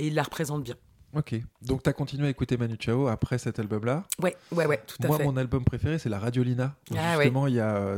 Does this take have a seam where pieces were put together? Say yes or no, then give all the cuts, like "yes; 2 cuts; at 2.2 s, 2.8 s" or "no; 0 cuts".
no; 0 cuts